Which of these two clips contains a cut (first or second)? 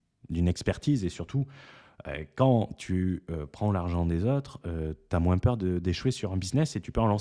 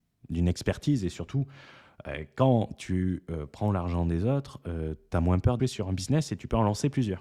second